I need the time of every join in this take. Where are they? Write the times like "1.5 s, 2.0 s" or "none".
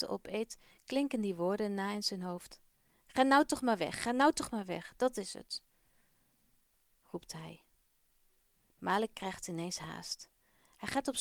none